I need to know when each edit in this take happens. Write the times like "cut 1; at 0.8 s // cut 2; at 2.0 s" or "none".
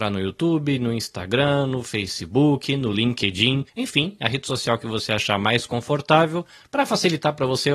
cut 1; at 3.7 s